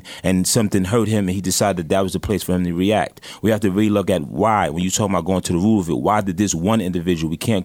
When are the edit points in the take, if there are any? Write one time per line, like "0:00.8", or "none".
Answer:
none